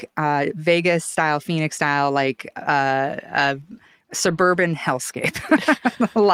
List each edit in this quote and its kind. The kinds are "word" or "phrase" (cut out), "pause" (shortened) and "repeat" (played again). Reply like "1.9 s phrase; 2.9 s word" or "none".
none

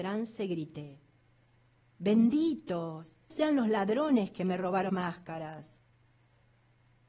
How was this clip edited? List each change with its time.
3.3 s word; 4.9 s word

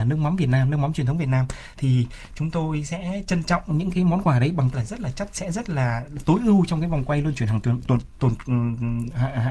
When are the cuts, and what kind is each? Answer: 4.7 s word; 5.3 s phrase

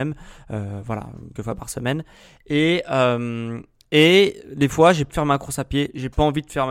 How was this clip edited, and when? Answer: 1.4 s word; 5.1 s word

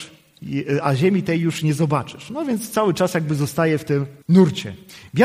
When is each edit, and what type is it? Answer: 4.2 s pause

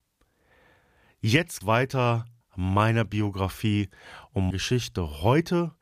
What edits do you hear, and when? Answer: 1.6 s word; 2.4 s word; 4.5 s word

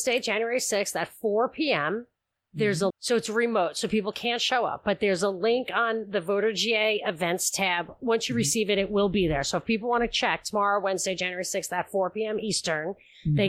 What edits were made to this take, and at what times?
2.9 s word

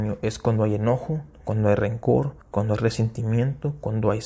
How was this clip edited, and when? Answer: 2.4 s pause

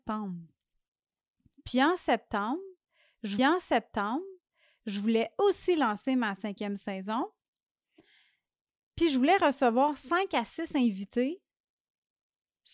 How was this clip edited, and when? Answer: 3.4 s repeat

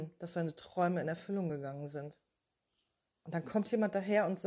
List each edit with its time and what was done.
none

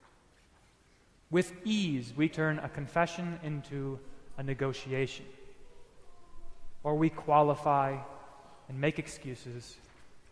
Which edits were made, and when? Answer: 2.3 s word

